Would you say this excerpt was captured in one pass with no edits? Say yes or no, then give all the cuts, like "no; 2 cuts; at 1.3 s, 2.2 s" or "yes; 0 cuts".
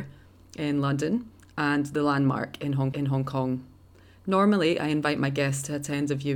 no; 1 cut; at 2.9 s